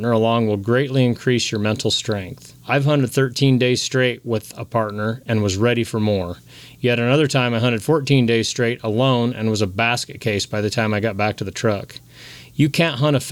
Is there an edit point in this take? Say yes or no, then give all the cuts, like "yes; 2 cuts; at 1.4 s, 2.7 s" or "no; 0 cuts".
yes; 1 cut; at 2.6 s